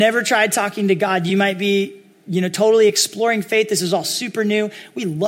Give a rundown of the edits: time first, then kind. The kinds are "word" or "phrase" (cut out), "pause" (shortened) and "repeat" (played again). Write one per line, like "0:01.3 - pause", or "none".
none